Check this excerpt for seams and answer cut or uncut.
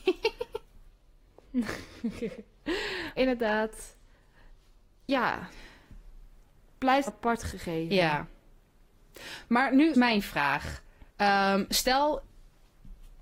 cut